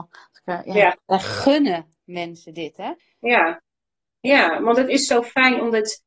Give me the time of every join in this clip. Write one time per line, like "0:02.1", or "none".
0:03.0